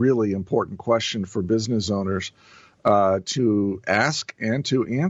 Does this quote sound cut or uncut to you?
uncut